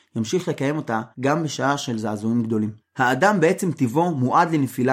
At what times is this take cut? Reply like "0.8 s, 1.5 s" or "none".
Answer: 1.1 s, 2.8 s